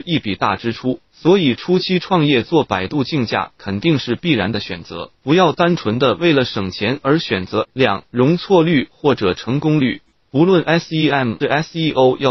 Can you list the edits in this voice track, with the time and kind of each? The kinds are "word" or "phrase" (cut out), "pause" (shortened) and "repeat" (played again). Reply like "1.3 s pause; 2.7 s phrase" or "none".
5.1 s pause; 7.6 s word; 11.4 s phrase